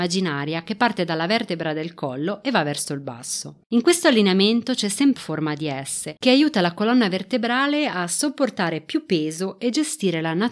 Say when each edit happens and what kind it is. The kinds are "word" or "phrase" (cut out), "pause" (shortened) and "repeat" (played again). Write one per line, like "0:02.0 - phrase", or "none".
0:03.6 - pause
0:05.2 - phrase
0:06.2 - pause